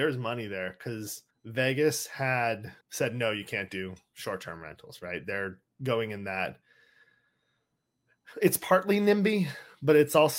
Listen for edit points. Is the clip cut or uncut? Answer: cut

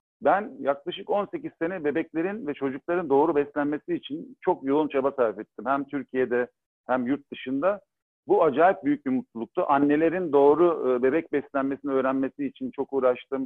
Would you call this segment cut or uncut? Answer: uncut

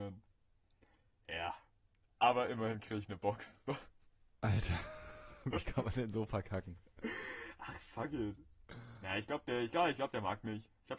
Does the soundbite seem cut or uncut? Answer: uncut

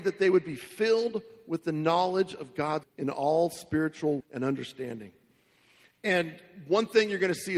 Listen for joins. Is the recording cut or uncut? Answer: cut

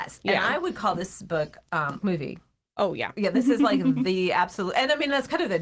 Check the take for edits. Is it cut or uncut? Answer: cut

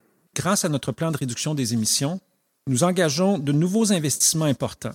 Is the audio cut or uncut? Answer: uncut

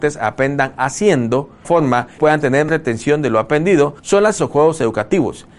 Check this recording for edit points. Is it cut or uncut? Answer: cut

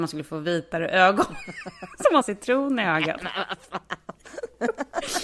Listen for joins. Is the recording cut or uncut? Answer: cut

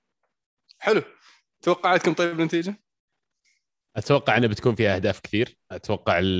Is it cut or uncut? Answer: uncut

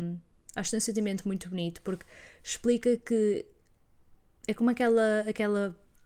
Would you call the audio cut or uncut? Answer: uncut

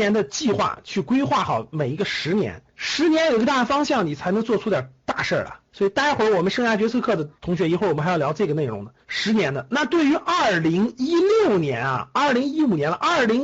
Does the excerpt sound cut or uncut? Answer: cut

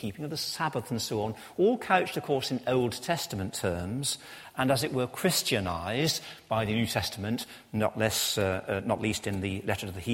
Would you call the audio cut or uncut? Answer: uncut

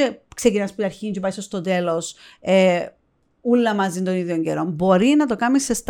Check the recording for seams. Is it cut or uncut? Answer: uncut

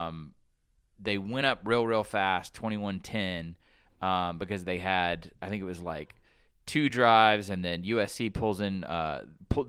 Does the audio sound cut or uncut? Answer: uncut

